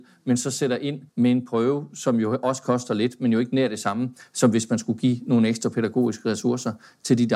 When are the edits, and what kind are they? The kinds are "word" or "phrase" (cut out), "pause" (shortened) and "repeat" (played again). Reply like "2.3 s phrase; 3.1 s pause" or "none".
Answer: 1.1 s pause